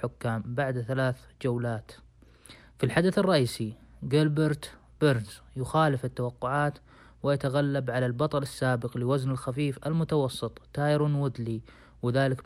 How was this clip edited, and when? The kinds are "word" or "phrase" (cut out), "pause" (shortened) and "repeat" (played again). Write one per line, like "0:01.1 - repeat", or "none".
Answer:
none